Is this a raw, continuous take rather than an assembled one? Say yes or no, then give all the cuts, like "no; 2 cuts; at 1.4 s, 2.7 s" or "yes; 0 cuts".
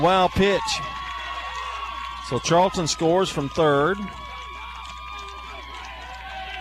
yes; 0 cuts